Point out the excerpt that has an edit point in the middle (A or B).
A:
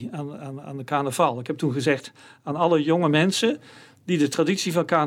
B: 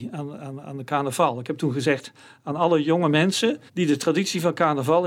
B